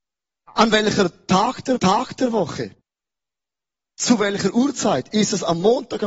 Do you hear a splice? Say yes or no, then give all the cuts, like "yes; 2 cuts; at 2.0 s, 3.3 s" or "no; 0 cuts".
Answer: yes; 1 cut; at 1.8 s